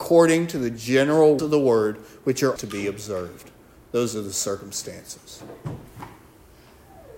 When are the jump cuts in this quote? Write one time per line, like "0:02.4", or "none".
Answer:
0:01.4
0:02.6